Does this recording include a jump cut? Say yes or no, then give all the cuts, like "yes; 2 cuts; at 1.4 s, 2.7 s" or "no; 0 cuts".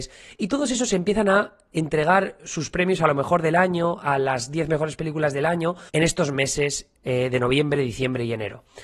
yes; 1 cut; at 5.9 s